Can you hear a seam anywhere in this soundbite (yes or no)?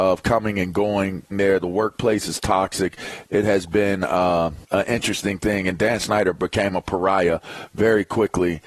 yes